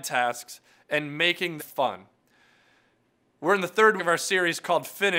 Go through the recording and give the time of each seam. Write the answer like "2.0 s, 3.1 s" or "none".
1.6 s, 4.0 s